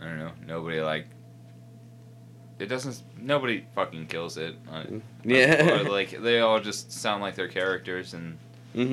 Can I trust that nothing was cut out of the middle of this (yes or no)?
yes